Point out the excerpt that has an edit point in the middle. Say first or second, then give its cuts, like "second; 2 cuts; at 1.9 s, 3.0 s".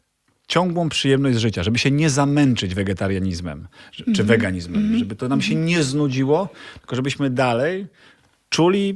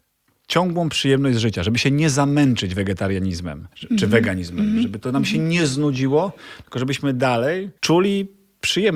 second; 2 cuts; at 3.7 s, 7.8 s